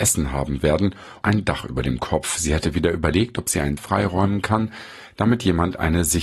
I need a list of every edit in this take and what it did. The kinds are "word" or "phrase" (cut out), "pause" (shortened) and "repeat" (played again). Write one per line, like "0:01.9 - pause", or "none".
0:01.2 - word
0:03.8 - word